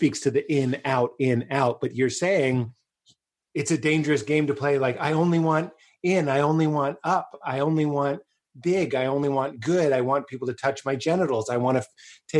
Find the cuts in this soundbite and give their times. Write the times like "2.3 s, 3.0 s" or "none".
none